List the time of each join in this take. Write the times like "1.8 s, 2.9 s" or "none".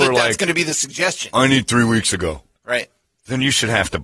none

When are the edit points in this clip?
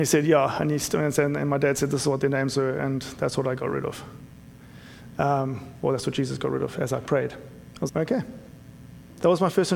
7.9 s

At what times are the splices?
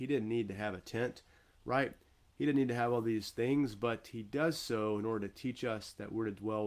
none

